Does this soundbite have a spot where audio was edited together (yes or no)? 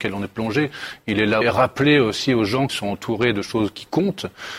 yes